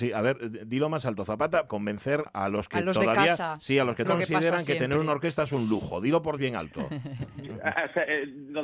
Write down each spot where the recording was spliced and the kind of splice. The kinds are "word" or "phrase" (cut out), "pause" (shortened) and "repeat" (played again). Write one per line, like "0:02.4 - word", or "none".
0:01.7 - word
0:02.3 - word
0:04.0 - word
0:06.4 - word
0:07.5 - word